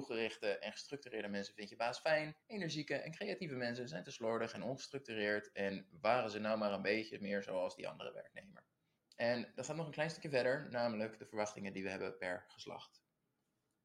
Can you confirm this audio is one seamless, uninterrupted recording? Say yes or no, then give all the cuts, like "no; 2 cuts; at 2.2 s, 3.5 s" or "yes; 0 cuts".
no; 2 cuts; at 2.4 s, 9.0 s